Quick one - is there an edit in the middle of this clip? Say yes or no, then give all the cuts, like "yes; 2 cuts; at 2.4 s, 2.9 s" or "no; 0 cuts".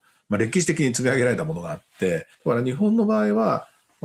yes; 1 cut; at 2.3 s